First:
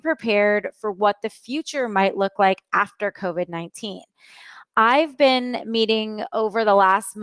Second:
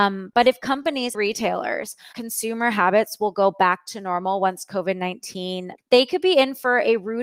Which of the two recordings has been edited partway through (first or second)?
second